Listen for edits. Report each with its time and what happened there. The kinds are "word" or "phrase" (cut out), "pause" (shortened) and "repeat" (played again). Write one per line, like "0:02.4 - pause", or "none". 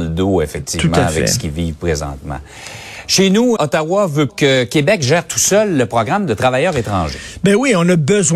0:03.6 - word
0:04.3 - word